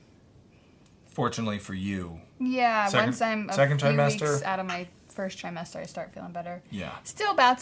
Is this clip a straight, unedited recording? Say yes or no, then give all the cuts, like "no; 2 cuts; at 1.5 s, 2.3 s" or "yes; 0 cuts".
yes; 0 cuts